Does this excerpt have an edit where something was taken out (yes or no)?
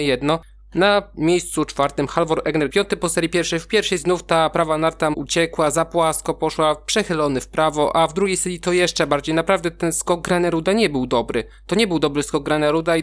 yes